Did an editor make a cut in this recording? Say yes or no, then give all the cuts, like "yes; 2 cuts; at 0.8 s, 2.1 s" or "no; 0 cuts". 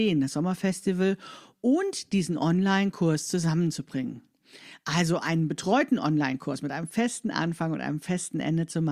no; 0 cuts